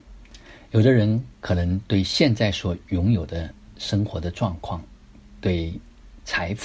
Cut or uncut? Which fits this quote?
cut